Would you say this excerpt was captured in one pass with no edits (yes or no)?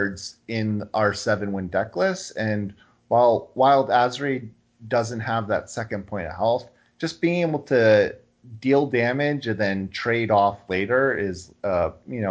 yes